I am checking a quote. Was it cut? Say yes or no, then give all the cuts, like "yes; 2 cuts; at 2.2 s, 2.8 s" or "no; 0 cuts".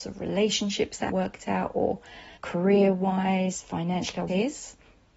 yes; 3 cuts; at 1.1 s, 2.4 s, 4.3 s